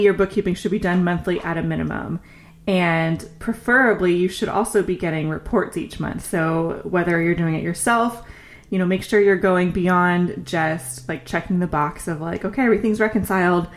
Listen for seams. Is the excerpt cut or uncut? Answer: uncut